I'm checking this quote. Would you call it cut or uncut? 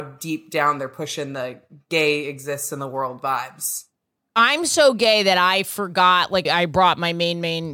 cut